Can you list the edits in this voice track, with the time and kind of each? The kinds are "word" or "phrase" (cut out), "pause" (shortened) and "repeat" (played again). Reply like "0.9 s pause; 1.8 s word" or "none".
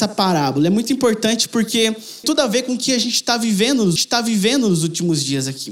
2.2 s word; 4.0 s repeat